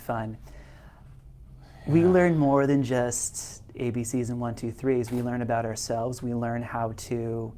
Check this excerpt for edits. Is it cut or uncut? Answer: uncut